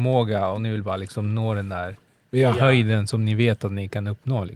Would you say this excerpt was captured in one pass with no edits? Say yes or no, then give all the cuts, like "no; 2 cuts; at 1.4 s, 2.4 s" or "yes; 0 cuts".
yes; 0 cuts